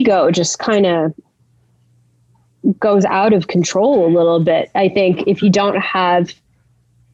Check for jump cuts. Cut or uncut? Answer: uncut